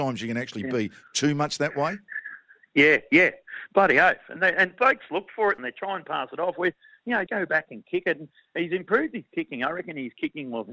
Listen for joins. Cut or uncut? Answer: cut